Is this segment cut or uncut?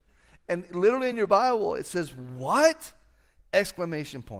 uncut